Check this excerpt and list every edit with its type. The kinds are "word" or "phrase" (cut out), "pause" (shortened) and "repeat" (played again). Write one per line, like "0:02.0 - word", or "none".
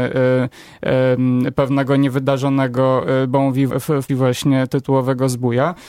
0:01.5 - word
0:03.7 - word
0:04.1 - word